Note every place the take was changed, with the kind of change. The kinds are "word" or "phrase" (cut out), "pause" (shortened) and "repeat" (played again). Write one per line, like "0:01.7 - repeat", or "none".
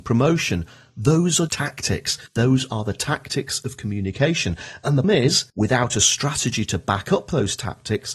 0:01.5 - word
0:02.3 - pause
0:05.0 - word
0:05.5 - pause